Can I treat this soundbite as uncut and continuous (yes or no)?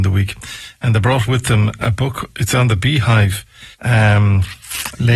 no